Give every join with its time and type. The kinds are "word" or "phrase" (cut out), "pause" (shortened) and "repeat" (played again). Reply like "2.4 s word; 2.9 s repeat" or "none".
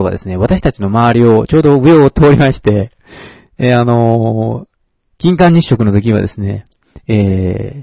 none